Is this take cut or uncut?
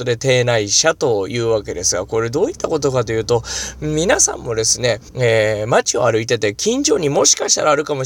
cut